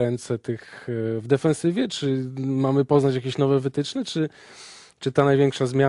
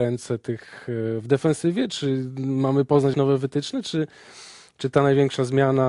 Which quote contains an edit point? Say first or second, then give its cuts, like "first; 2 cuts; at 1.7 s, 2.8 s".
second; 1 cut; at 3.1 s